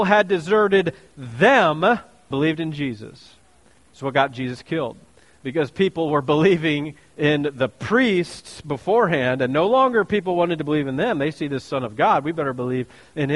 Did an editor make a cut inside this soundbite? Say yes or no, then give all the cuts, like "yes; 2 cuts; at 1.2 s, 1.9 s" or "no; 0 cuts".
yes; 1 cut; at 2.3 s